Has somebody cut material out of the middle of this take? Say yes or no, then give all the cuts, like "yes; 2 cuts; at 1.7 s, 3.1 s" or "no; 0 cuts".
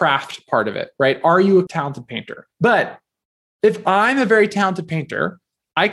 yes; 1 cut; at 2.5 s